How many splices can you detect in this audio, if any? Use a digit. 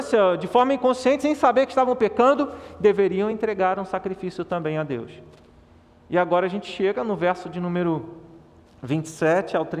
0